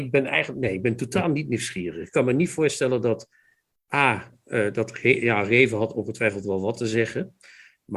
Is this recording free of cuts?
yes; 0 cuts

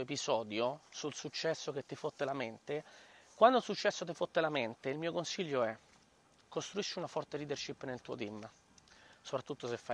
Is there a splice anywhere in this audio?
no; 0 cuts

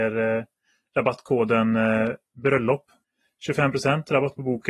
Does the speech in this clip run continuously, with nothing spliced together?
yes; 0 cuts

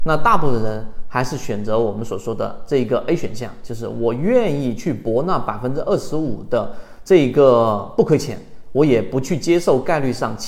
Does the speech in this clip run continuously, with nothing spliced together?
yes; 0 cuts

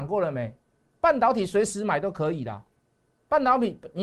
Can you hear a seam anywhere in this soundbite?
no; 0 cuts

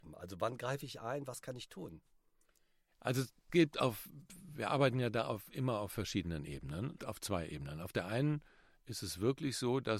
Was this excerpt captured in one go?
no; 2 cuts; at 3.5 s, 7.0 s

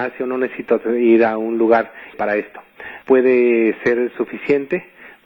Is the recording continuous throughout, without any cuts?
no; 2 cuts; at 2.1 s, 3.0 s

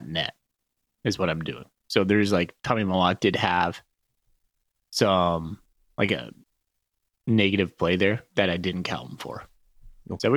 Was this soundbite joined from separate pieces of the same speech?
no; 0 cuts

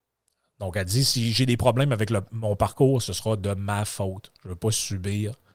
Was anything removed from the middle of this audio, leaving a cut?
no; 0 cuts

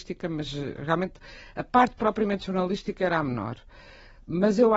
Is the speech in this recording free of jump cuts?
yes; 0 cuts

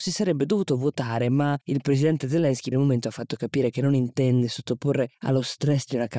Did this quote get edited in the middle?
yes; 3 cuts; at 1.6 s, 2.7 s, 5.1 s

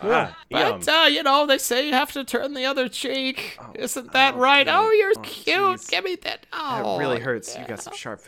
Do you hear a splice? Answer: yes; 1 cut; at 5.2 s

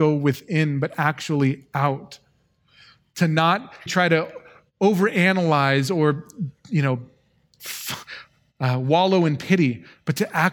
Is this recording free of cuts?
no; 1 cut; at 3.9 s

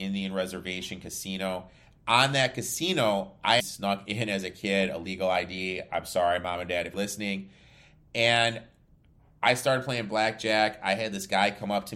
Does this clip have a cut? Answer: yes; 2 cuts; at 3.6 s, 6.9 s

